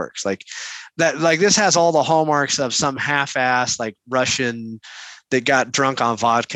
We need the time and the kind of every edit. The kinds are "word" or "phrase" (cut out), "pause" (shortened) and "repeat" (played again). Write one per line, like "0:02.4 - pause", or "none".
none